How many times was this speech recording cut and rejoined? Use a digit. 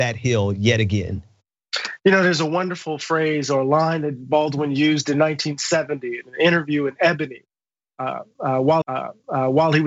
1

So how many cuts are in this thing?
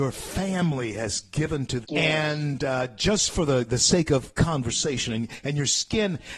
1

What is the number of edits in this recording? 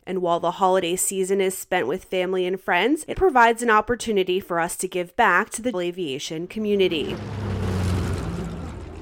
2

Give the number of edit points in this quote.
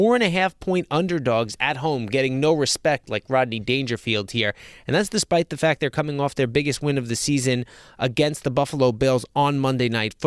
0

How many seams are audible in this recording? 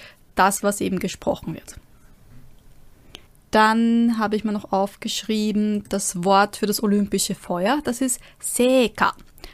1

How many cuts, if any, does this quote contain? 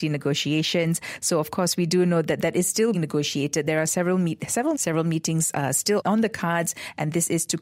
2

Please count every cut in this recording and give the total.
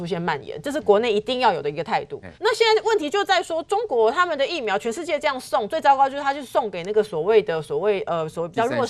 1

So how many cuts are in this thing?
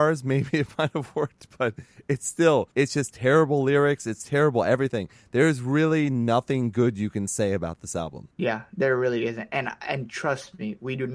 2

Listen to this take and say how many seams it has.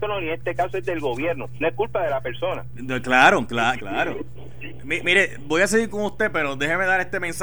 2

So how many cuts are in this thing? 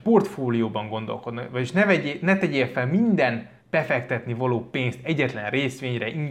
1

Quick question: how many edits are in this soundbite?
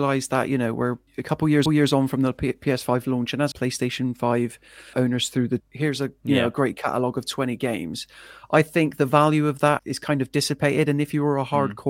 6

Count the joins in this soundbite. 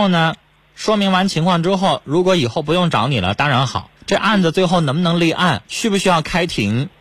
2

